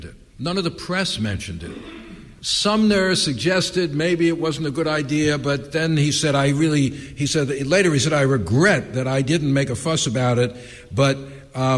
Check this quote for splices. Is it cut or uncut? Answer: cut